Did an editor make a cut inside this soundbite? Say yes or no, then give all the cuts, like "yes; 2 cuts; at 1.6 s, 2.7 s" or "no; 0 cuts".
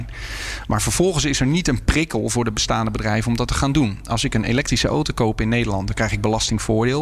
no; 0 cuts